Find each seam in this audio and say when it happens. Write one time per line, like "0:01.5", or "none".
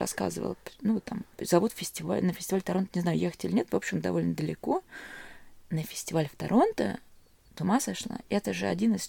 0:07.6